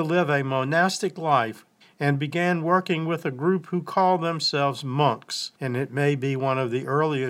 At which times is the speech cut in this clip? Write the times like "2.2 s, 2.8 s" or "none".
1.8 s, 5.6 s